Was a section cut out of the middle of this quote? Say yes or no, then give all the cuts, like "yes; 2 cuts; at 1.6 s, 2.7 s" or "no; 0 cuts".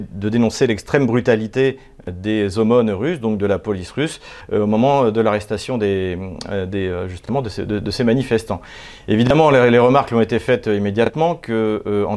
no; 0 cuts